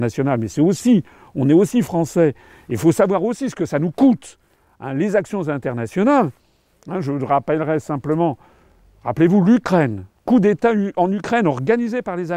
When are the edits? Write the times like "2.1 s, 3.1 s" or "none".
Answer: none